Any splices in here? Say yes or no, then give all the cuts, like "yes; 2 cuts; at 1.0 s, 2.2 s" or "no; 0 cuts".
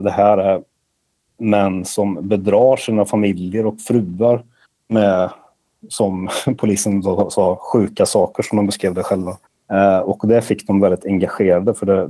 yes; 2 cuts; at 4.6 s, 9.5 s